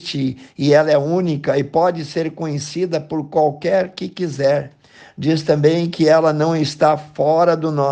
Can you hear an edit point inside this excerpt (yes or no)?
no